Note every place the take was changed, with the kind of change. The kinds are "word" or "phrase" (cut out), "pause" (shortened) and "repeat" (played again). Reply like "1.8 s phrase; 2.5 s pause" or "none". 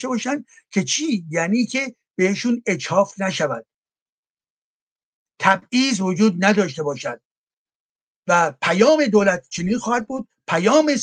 none